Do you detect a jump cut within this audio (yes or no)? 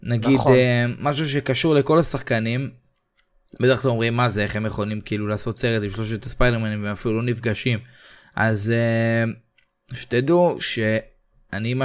no